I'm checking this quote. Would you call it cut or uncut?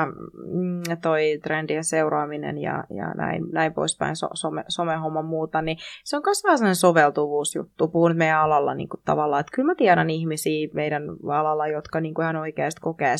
uncut